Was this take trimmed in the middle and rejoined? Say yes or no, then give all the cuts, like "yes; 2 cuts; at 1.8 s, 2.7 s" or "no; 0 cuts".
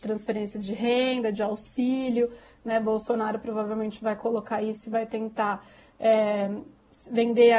no; 0 cuts